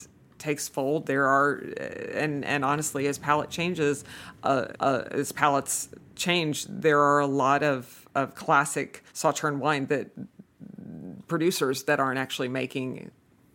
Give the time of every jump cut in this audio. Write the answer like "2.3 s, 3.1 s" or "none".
4.7 s, 9.1 s